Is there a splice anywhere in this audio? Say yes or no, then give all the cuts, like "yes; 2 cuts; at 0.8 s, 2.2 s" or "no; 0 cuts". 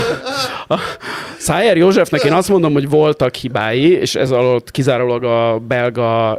no; 0 cuts